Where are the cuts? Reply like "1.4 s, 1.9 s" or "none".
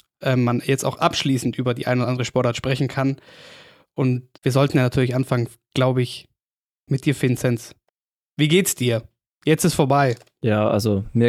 4.4 s, 7.9 s

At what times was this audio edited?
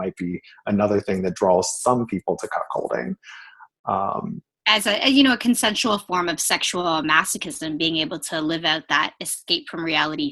none

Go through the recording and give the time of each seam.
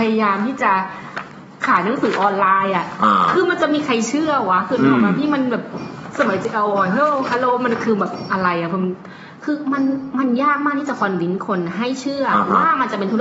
none

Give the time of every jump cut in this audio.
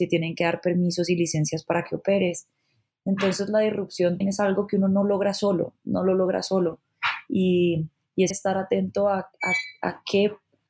4.2 s, 8.3 s

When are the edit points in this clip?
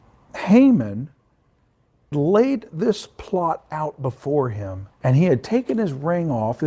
2.1 s, 4.9 s

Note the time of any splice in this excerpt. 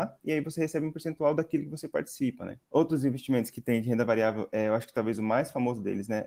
2.6 s

